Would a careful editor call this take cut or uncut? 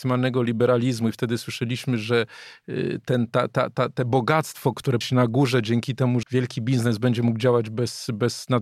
cut